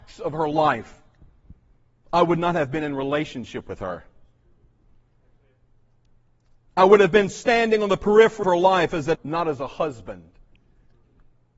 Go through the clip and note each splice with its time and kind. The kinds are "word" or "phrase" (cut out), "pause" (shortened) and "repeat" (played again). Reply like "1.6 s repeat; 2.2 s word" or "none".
8.4 s word; 9.1 s word

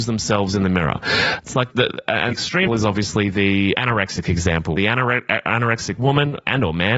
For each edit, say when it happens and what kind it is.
1.7 s word; 2.3 s word; 2.7 s word; 3.7 s word; 4.8 s word

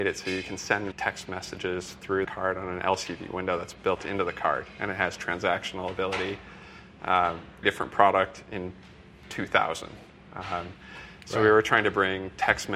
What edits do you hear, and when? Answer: 0.9 s word; 2.2 s word; 7.6 s word

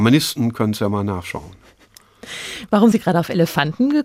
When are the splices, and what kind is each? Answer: 2.9 s word

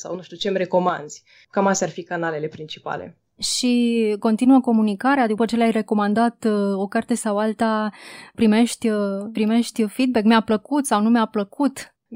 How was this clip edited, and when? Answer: 9.3 s word

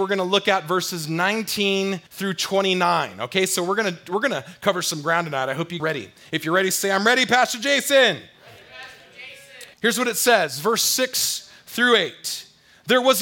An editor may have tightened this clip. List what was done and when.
2.1 s pause; 5.8 s phrase; 9.7 s pause

